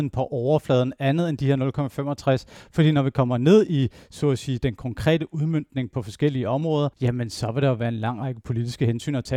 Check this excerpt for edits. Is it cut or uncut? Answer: cut